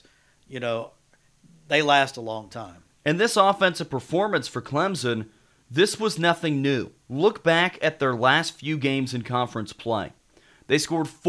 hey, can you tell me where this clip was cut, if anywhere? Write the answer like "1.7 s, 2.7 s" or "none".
7.0 s